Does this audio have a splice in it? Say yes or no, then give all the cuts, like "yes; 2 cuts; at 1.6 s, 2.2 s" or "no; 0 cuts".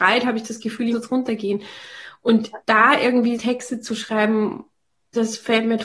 yes; 3 cuts; at 0.9 s, 2.6 s, 3.3 s